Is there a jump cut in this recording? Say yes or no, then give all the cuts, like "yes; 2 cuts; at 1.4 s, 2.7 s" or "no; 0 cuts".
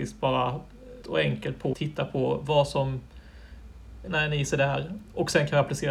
yes; 3 cuts; at 1.0 s, 1.7 s, 4.1 s